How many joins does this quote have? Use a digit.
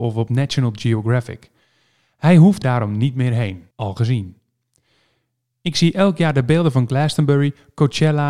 2